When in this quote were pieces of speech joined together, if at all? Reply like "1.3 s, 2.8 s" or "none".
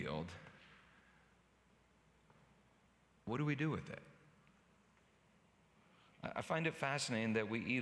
none